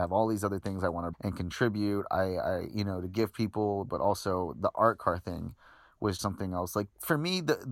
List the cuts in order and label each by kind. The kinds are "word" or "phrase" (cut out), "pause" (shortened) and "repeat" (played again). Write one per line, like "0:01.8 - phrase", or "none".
0:01.1 - word
0:06.2 - word